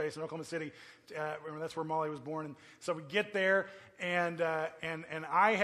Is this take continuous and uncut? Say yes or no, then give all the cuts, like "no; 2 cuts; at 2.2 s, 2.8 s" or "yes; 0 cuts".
yes; 0 cuts